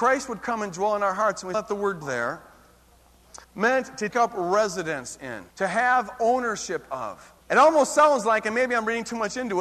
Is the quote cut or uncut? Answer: cut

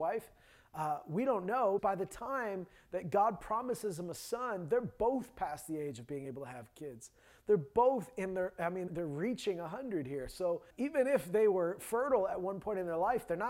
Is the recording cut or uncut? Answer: cut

